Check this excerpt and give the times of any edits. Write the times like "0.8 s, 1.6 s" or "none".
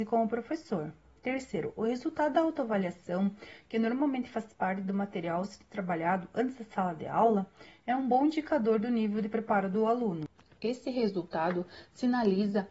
10.4 s